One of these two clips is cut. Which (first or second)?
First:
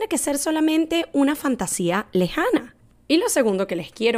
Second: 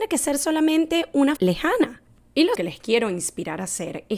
second